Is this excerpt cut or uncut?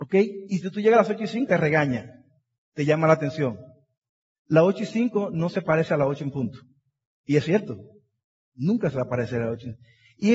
cut